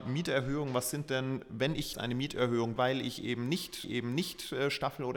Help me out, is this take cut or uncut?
cut